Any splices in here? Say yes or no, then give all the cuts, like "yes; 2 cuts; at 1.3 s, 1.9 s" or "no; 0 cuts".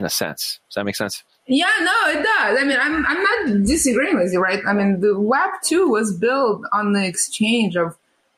no; 0 cuts